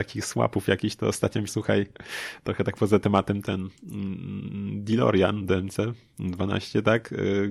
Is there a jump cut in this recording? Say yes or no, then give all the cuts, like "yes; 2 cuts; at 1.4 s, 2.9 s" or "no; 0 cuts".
yes; 1 cut; at 1.5 s